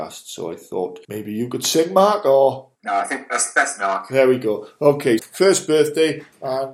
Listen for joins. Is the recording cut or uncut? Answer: cut